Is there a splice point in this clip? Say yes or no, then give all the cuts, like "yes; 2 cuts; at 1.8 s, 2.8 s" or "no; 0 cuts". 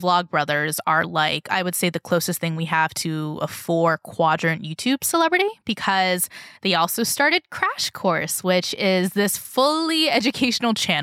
no; 0 cuts